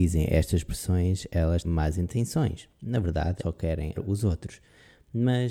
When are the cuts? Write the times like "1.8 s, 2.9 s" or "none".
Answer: 1.6 s, 3.4 s, 3.9 s